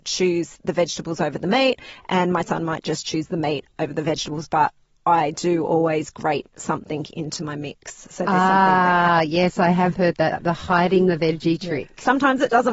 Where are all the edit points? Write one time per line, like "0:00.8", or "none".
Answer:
none